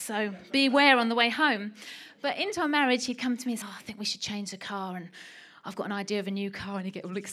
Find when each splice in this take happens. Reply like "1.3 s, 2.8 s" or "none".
3.6 s